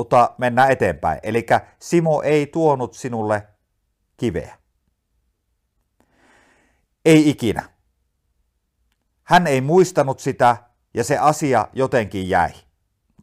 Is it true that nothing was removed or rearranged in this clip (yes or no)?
yes